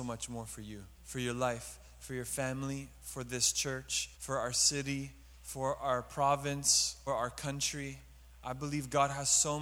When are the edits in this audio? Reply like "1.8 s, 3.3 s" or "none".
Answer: 0.9 s, 4.1 s, 5.3 s, 7.1 s